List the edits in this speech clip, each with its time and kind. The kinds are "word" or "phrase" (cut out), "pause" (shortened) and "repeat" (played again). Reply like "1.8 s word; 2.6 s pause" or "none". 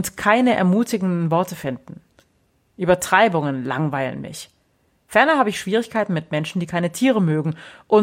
none